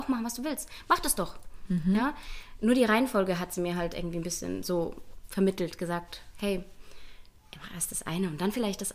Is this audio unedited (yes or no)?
yes